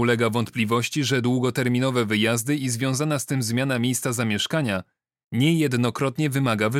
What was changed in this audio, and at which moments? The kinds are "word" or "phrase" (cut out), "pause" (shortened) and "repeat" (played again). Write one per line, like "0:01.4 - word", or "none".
none

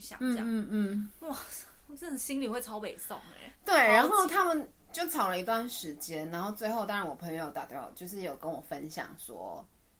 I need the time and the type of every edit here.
none

